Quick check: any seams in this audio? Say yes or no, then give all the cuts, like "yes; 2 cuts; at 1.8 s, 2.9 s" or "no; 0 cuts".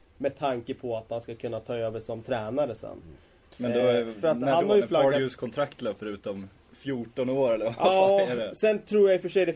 no; 0 cuts